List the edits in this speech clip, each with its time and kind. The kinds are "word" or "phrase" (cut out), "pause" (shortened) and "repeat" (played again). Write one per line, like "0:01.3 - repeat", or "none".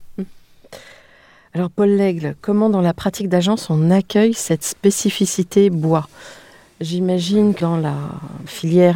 0:07.6 - word